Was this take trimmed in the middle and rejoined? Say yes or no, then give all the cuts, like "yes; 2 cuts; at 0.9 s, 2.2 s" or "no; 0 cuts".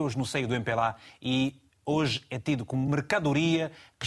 no; 0 cuts